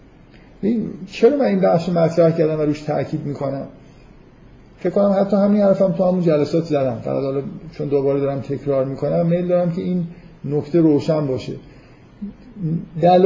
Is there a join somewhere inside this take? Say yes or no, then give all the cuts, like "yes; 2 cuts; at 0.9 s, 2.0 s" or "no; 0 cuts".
no; 0 cuts